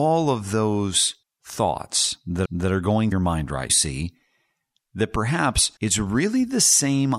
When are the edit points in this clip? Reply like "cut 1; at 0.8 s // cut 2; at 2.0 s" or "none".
cut 1; at 1.2 s // cut 2; at 2.4 s // cut 3; at 3.1 s // cut 4; at 3.7 s // cut 5; at 5.8 s